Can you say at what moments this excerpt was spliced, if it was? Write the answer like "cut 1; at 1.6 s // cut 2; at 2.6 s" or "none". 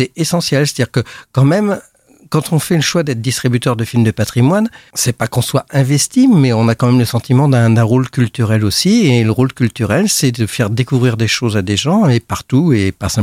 none